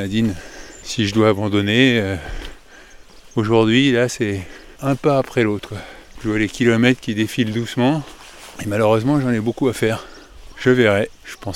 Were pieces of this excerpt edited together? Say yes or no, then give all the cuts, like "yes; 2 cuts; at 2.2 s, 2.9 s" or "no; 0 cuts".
no; 0 cuts